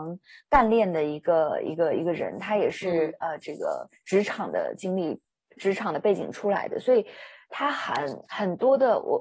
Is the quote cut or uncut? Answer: uncut